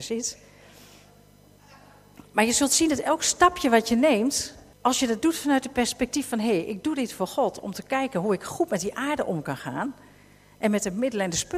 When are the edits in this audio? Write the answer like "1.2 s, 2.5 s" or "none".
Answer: 4.7 s